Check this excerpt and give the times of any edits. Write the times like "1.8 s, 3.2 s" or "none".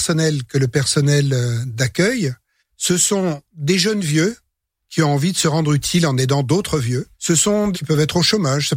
2.6 s, 7.1 s, 7.7 s